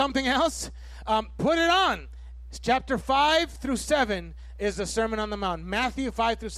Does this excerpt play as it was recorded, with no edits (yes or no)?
yes